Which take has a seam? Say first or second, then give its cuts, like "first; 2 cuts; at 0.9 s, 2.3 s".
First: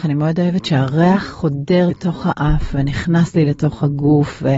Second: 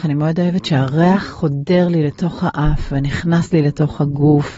first; 1 cut; at 1.9 s